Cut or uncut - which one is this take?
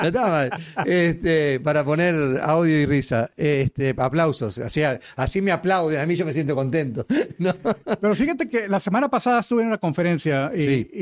uncut